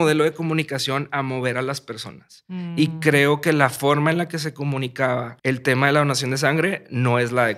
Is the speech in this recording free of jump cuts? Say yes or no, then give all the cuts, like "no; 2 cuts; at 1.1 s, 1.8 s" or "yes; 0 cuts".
no; 1 cut; at 5.4 s